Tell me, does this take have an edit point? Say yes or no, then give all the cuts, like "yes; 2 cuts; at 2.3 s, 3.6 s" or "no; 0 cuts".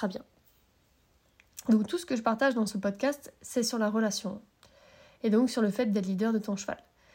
no; 0 cuts